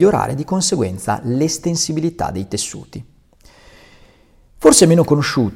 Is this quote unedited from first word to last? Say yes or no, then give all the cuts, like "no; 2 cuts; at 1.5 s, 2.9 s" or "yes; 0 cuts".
yes; 0 cuts